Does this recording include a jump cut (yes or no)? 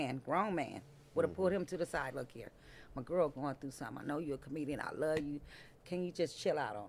no